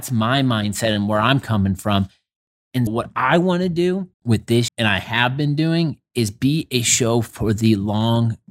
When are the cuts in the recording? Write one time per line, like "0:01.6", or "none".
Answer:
0:02.9
0:04.1
0:04.7